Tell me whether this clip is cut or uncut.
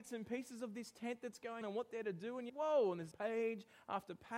cut